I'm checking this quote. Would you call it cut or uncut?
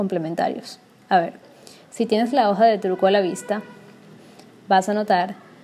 uncut